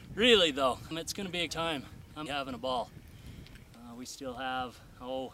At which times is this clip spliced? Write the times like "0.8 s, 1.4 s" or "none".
0.9 s, 1.5 s, 2.3 s